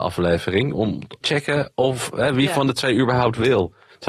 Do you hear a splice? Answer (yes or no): yes